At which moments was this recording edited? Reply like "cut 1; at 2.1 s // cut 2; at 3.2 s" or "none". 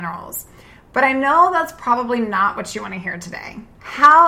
none